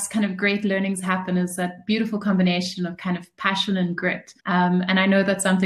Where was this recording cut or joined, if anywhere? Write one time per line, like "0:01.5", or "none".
0:04.4